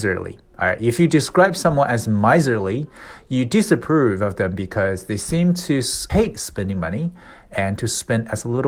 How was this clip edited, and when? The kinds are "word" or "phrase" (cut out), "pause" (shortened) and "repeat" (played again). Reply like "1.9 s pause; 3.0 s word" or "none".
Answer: 6.1 s word